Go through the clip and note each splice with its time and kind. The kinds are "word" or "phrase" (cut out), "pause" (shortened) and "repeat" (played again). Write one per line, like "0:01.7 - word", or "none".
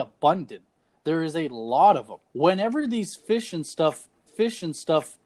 0:02.2 - pause
0:04.3 - repeat